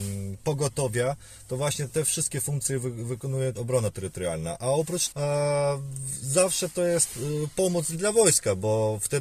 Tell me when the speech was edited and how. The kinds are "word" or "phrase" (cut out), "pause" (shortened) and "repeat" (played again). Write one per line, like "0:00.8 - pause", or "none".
0:03.5 - word
0:05.1 - word
0:07.9 - word